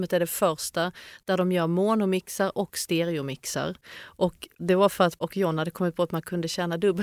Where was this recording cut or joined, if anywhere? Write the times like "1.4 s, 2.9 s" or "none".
4.6 s, 5.2 s